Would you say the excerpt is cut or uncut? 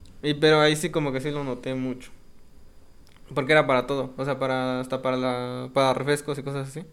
uncut